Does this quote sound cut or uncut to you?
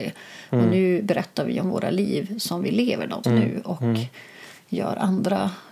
cut